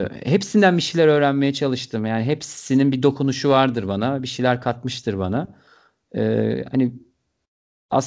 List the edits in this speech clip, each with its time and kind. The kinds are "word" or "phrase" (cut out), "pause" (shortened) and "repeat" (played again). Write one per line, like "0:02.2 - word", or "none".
none